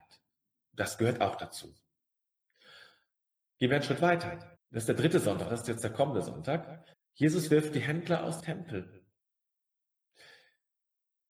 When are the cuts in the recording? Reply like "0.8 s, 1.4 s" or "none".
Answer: 4.6 s, 6.9 s, 8.4 s